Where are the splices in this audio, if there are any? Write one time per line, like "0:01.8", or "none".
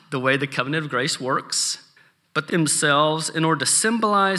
0:02.0
0:02.5